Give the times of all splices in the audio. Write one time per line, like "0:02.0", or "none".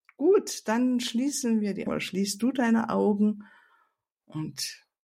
0:01.9